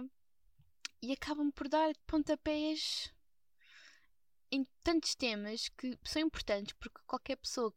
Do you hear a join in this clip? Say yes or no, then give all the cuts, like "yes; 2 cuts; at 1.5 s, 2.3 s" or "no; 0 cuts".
yes; 1 cut; at 2.0 s